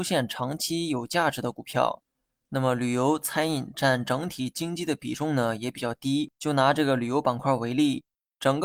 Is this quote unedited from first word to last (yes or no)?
no